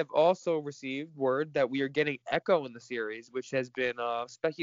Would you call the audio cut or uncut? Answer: uncut